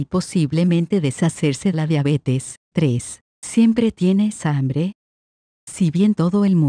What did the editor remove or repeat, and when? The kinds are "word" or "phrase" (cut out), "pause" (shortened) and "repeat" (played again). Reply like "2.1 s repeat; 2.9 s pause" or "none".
1.7 s phrase; 2.6 s pause